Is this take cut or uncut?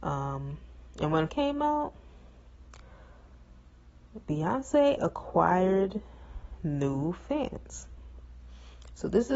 cut